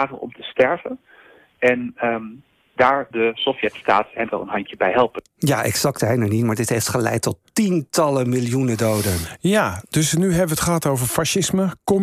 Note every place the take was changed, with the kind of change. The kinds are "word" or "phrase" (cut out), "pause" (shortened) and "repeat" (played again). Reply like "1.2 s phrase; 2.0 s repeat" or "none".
3.1 s word; 4.3 s word; 6.0 s word